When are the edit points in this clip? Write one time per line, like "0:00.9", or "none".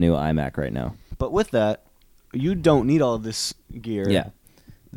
none